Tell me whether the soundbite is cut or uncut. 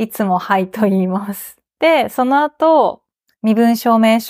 cut